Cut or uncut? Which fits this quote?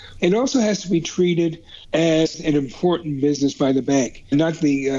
cut